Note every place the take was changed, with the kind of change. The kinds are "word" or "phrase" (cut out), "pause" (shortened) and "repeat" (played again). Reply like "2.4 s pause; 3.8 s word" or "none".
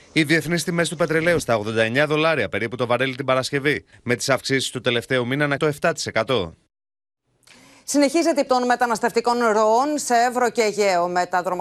1.4 s word; 5.6 s word; 8.5 s word

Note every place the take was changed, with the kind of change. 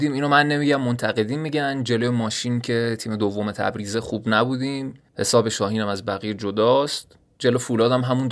none

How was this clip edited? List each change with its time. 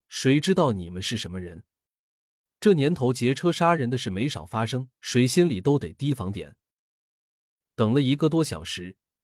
5.0 s pause

